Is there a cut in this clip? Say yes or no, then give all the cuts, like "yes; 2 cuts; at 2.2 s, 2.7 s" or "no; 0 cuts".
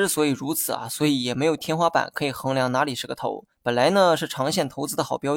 yes; 1 cut; at 3.5 s